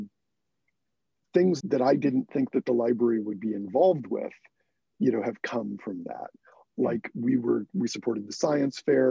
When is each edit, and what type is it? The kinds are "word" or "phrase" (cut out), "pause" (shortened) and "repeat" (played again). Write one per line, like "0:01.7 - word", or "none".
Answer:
0:01.6 - word